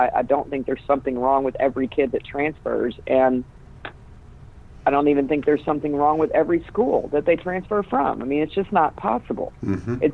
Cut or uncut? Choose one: uncut